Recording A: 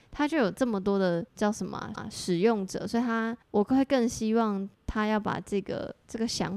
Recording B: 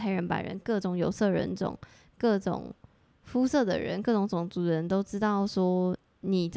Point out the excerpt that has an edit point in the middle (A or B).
A